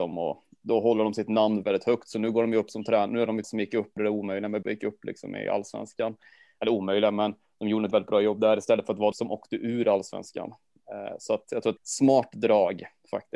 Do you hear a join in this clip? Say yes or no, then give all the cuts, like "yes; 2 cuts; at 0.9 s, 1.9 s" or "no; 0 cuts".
yes; 7 cuts; at 1.6 s, 3.4 s, 4.0 s, 4.6 s, 7.9 s, 9.1 s, 11.8 s